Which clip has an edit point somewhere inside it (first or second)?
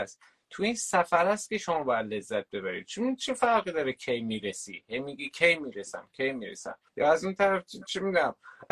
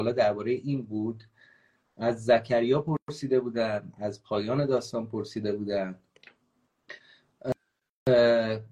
first